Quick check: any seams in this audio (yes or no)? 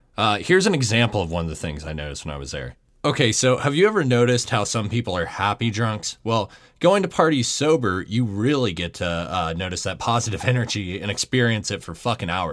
no